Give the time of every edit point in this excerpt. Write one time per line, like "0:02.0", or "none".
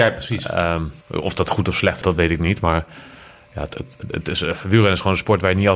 0:01.0
0:02.0
0:04.0